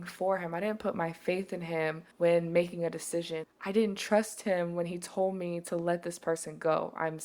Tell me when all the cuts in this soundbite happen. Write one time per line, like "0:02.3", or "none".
0:02.1